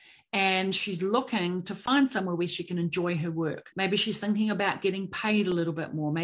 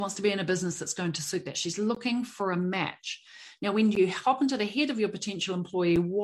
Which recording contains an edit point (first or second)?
first